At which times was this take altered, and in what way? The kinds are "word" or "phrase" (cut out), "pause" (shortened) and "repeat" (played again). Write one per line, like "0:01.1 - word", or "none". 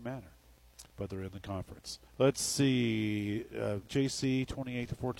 0:02.1 - pause
0:03.8 - phrase

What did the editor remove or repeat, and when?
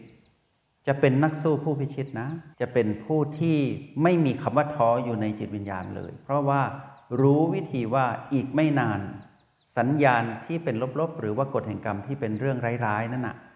0:02.5 - pause

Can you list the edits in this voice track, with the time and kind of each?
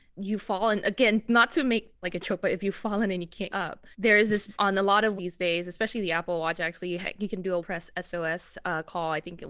0:02.0 - phrase
0:03.5 - word
0:03.9 - pause
0:04.5 - word
0:05.2 - phrase
0:07.6 - word

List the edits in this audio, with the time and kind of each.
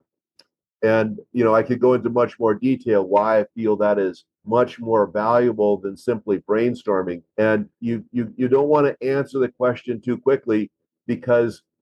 0:04.3 - pause
0:07.3 - pause

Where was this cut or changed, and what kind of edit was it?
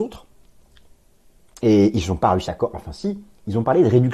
0:02.5 - phrase

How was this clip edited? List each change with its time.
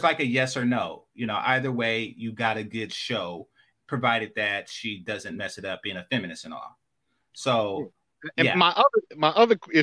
none

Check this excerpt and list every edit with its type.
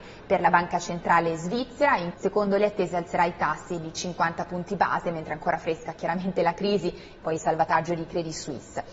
0:02.1 - phrase

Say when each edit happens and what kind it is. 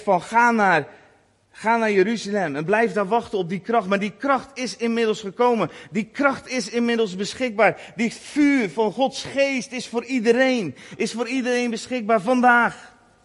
none

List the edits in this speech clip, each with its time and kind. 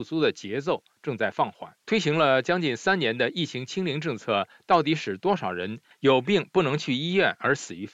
0:01.8 - pause

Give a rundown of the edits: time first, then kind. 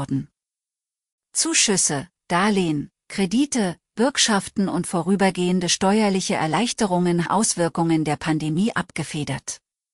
0:07.3 - phrase

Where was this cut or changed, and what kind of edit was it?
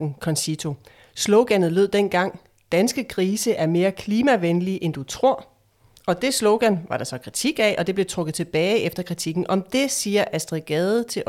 none

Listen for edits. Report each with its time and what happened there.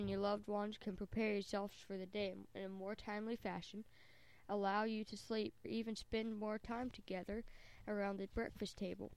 0:05.6 - phrase
0:06.6 - word

